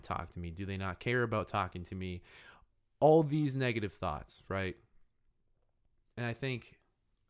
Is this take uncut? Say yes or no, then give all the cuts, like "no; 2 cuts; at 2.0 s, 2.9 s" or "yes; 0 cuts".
yes; 0 cuts